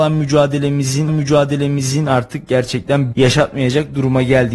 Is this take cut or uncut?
cut